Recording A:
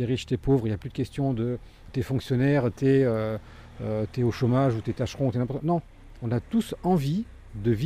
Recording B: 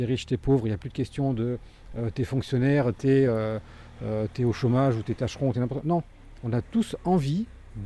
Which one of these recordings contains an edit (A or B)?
A